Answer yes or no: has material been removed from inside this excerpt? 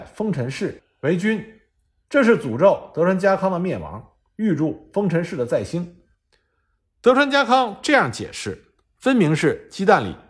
no